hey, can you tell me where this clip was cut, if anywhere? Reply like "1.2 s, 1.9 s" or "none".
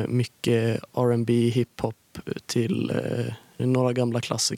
3.6 s